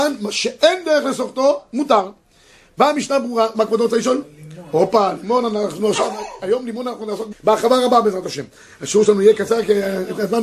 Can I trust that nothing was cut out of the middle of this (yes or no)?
no